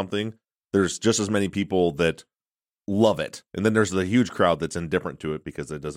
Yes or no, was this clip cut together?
no